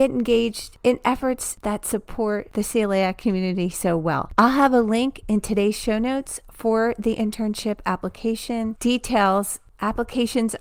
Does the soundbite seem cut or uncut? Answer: uncut